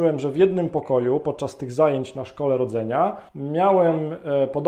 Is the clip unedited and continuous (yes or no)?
no